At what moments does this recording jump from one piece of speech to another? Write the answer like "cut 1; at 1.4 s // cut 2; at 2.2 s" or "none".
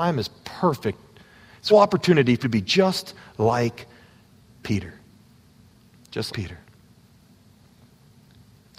cut 1; at 1.7 s // cut 2; at 2.4 s // cut 3; at 6.3 s